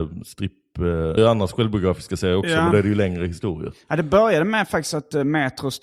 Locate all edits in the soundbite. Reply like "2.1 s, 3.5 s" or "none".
1.2 s